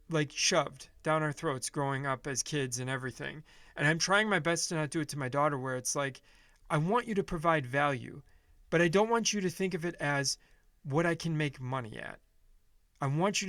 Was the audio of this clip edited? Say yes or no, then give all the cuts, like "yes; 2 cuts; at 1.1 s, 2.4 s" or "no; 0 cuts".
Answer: no; 0 cuts